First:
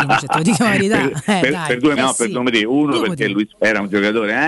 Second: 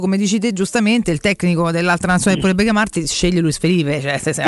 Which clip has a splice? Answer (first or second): first